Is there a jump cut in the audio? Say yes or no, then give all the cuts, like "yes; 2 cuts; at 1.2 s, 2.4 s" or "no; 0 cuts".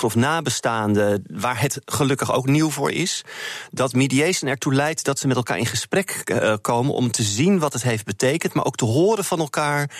no; 0 cuts